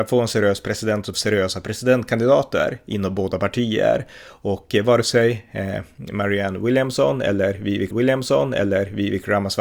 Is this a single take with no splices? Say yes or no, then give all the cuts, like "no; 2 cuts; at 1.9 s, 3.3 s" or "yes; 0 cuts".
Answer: no; 2 cuts; at 1.1 s, 7.9 s